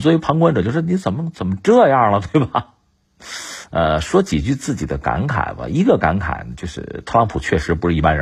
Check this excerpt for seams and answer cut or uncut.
uncut